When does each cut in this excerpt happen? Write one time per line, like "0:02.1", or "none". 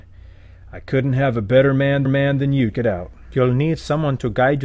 0:02.0
0:02.7